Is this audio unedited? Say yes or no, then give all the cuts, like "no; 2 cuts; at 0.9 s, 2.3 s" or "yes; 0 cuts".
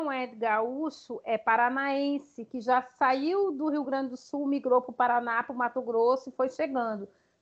yes; 0 cuts